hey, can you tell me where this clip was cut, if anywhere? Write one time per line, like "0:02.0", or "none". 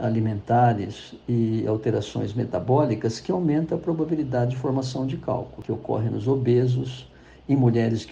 none